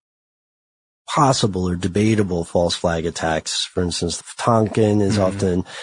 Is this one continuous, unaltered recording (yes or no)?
no